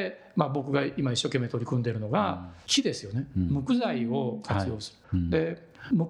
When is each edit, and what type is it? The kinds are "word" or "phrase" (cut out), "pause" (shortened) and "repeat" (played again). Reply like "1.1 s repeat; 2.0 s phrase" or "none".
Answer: 5.0 s pause